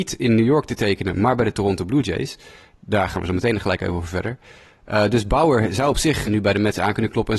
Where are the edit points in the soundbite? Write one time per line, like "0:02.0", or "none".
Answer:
0:06.2